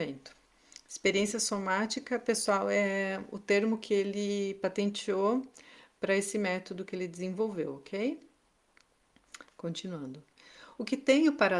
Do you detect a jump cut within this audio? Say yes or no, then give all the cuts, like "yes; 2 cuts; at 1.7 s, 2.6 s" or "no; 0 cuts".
no; 0 cuts